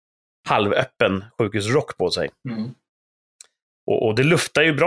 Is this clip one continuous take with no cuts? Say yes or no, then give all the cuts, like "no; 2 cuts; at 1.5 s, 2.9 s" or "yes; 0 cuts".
yes; 0 cuts